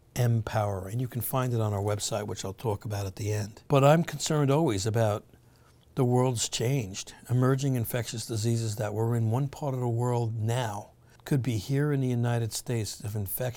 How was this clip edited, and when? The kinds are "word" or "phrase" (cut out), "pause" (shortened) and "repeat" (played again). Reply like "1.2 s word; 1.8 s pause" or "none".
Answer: 3.7 s pause; 11.2 s pause